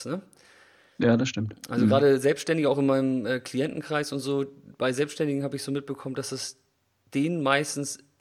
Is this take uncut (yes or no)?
yes